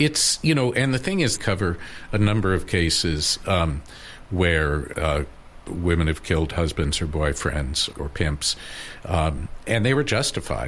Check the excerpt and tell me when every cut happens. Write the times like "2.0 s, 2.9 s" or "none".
1.4 s, 4.9 s, 7.9 s